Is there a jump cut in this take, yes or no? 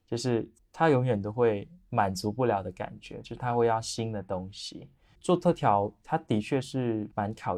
no